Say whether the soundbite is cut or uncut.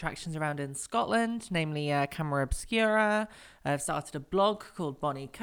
uncut